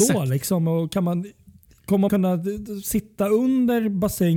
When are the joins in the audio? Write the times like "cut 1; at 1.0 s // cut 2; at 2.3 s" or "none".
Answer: cut 1; at 2.1 s